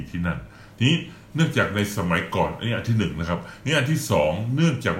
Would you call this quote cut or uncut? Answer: uncut